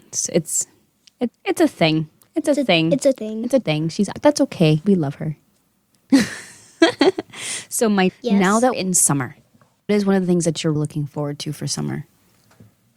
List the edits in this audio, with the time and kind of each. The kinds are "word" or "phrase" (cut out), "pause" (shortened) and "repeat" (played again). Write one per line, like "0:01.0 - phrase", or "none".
0:01.3 - word
0:03.1 - word
0:03.6 - word
0:04.1 - word
0:04.8 - word
0:08.1 - word
0:08.7 - word
0:09.9 - word
0:10.8 - word